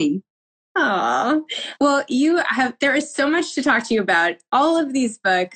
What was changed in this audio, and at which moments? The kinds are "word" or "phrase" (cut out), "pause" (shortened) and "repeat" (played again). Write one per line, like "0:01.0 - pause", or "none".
none